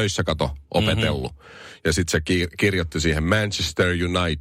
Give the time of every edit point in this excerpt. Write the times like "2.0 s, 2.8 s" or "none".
none